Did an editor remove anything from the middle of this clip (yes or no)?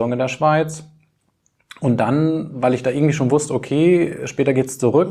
no